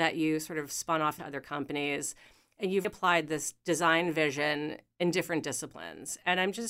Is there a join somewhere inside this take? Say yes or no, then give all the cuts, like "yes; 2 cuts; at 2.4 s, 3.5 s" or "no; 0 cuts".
yes; 2 cuts; at 1.2 s, 2.8 s